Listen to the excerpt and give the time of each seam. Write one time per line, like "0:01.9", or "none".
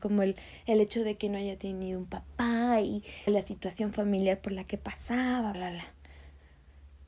0:03.3
0:05.5